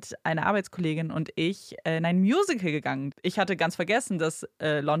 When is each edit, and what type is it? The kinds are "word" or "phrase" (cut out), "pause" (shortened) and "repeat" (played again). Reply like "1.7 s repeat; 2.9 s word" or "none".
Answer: 3.1 s word